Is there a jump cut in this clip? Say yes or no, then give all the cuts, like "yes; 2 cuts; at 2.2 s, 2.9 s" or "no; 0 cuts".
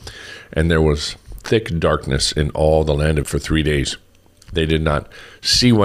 yes; 1 cut; at 3.2 s